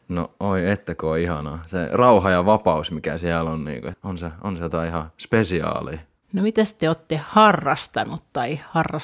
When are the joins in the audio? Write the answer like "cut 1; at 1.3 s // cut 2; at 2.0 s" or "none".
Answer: cut 1; at 3.9 s